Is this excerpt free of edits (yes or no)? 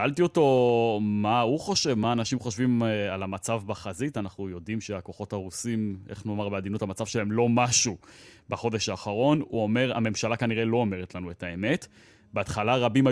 yes